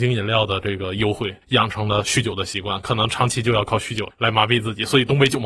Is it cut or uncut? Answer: cut